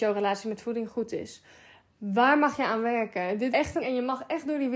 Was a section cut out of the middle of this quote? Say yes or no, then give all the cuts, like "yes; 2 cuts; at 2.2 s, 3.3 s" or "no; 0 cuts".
yes; 2 cuts; at 3.5 s, 3.8 s